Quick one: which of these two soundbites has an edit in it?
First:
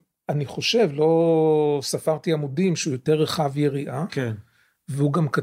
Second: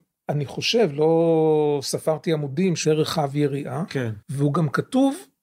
second; 2 cuts; at 2.8 s, 4.2 s

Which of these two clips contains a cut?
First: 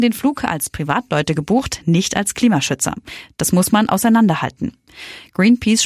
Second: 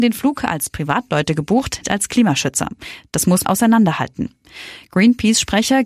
second; 2 cuts; at 1.8 s, 3.4 s

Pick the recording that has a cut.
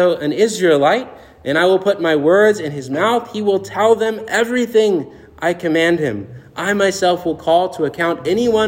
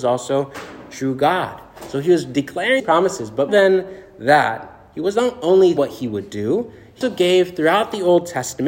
second; 4 cuts; at 2.8 s, 3.5 s, 5.8 s, 7.0 s

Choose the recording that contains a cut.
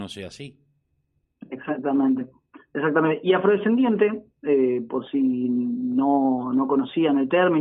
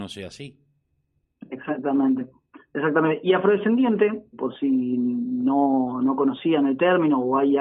second; 1 cut; at 4.3 s

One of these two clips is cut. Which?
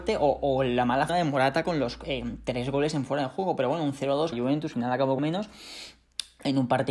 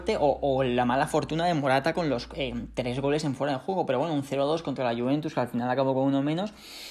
first; 4 cuts; at 1.1 s, 4.3 s, 4.7 s, 5.2 s

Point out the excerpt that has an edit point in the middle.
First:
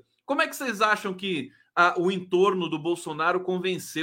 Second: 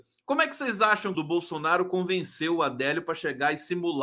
second; 1 cut; at 1.1 s

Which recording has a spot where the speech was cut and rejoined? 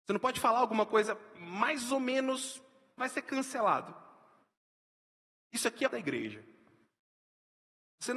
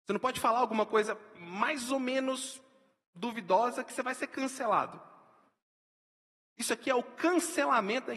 first; 2 cuts; at 3.0 s, 5.9 s

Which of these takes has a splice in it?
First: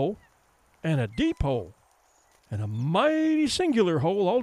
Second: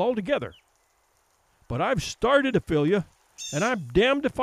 second; 1 cut; at 2.5 s

